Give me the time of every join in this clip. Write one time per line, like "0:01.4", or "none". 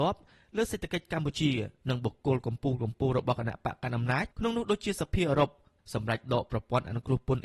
0:04.3